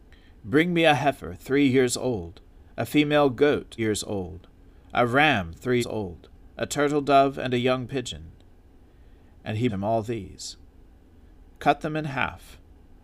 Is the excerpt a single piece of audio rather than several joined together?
no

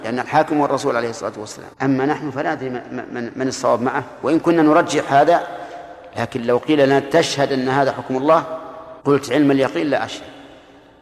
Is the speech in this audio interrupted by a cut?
yes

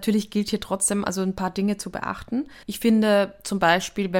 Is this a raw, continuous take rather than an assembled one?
no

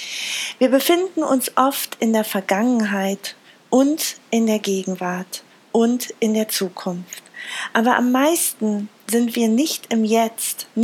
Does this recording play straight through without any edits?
yes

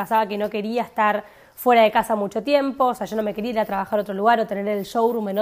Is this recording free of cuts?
yes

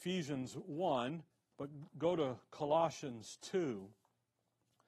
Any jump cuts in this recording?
yes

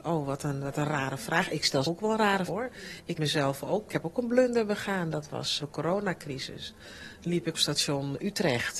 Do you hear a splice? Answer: yes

